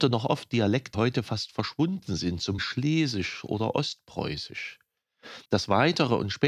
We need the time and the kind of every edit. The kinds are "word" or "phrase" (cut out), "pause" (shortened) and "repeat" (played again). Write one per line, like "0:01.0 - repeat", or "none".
0:00.9 - word
0:02.6 - word
0:05.4 - pause